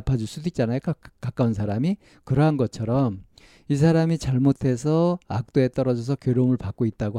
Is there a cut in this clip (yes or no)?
no